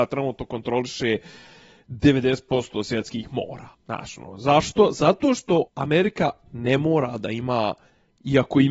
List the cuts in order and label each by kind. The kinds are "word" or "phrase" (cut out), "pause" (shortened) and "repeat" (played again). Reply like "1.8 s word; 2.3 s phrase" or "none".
3.7 s pause; 5.7 s pause